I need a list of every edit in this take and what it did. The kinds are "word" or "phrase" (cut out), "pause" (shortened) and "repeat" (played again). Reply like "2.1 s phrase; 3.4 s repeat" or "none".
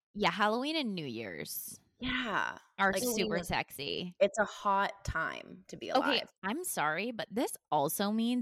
3.0 s word; 6.3 s pause